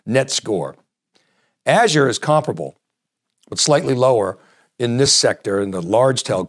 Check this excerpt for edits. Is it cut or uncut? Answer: uncut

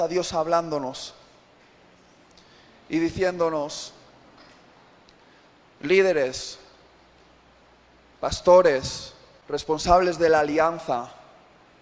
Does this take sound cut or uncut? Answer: uncut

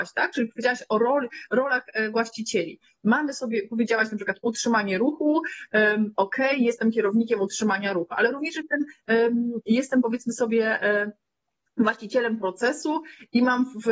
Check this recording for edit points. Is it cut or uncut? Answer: uncut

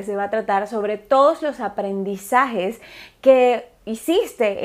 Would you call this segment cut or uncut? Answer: uncut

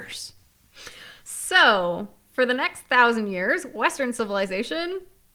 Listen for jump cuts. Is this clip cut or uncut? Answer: uncut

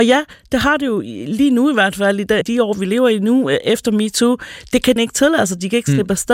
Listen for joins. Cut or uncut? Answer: cut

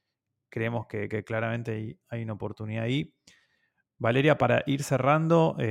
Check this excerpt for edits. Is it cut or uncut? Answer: uncut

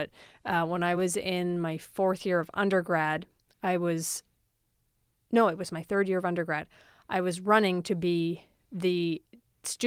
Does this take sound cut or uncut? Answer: uncut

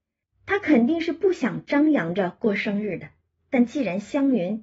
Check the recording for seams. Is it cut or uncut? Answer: uncut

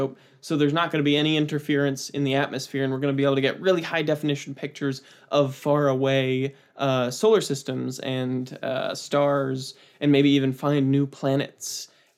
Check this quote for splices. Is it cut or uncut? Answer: uncut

